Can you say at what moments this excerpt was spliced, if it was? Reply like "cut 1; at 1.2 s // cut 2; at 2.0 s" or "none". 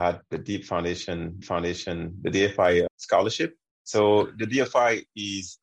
cut 1; at 1.4 s // cut 2; at 2.9 s